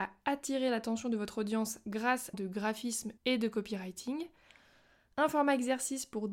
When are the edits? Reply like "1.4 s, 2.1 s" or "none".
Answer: 2.3 s, 3.2 s